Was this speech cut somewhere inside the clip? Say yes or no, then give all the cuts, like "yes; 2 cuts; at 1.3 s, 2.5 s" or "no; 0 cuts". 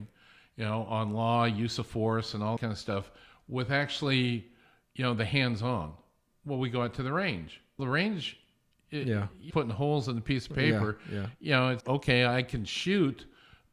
yes; 4 cuts; at 2.6 s, 7.8 s, 9.5 s, 11.8 s